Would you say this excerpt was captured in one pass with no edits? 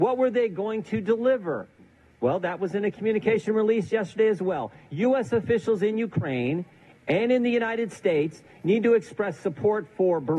yes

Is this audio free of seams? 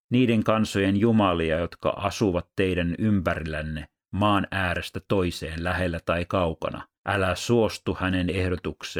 no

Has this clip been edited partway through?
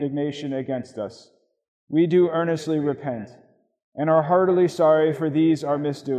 no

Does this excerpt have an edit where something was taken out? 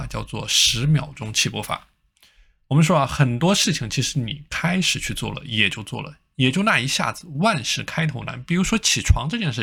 no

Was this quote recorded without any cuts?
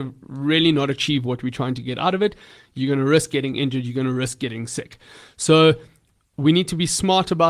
yes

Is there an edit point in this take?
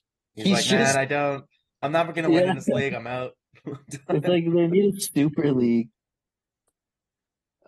no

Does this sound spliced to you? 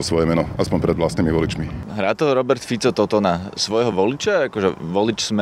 no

